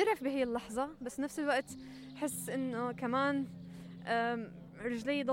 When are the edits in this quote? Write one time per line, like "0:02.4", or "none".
0:01.0